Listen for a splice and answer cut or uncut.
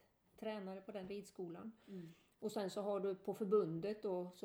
uncut